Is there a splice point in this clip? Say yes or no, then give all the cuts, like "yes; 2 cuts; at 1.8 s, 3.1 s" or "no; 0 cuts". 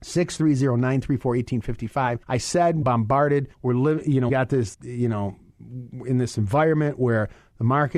yes; 5 cuts; at 2.2 s, 2.8 s, 3.5 s, 4.3 s, 4.7 s